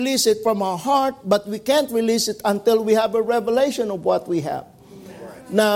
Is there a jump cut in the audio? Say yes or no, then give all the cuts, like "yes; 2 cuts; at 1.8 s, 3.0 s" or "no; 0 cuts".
no; 0 cuts